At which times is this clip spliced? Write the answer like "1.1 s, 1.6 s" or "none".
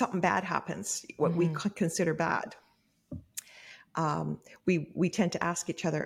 none